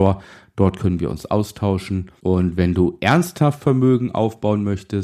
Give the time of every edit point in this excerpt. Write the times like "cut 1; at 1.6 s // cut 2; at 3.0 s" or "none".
cut 1; at 2.2 s